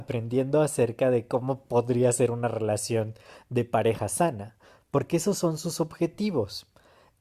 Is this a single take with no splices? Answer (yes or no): yes